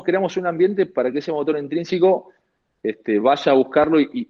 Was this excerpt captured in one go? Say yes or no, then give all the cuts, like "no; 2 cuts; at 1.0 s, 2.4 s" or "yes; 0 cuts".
yes; 0 cuts